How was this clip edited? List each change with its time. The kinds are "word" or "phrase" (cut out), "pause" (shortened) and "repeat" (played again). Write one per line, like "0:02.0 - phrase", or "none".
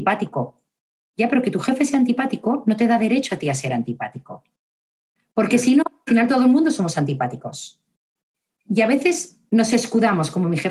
none